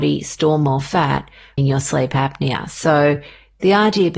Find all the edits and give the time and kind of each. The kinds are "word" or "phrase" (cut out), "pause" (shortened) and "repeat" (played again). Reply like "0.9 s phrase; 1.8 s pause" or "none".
1.6 s word